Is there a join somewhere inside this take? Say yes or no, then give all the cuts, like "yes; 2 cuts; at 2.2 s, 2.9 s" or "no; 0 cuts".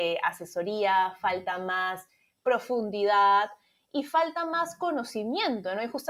no; 0 cuts